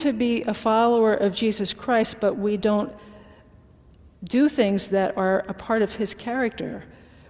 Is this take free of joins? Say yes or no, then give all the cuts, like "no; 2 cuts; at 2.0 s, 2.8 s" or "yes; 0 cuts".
yes; 0 cuts